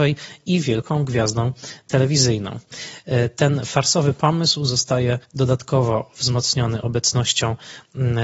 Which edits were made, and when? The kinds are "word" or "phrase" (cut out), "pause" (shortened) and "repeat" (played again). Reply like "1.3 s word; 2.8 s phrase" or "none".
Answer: 5.2 s pause

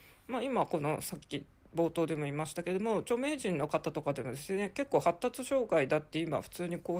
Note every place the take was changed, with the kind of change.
none

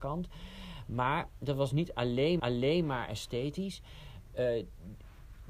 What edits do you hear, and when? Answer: 2.4 s repeat

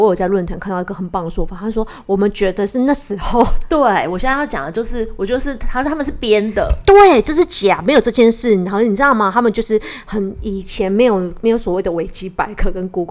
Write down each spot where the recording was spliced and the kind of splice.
none

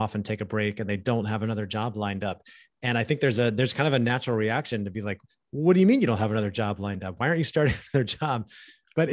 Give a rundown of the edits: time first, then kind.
none

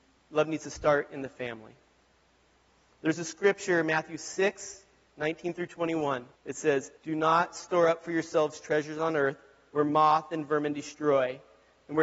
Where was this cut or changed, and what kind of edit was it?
6.4 s pause; 7.0 s pause

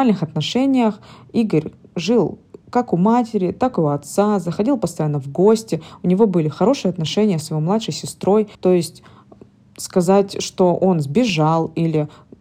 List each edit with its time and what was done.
8.5 s pause

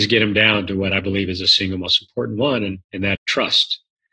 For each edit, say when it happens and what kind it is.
2.8 s pause; 3.1 s word

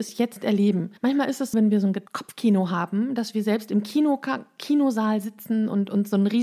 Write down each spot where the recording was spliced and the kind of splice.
1.0 s pause; 1.5 s word; 2.1 s pause

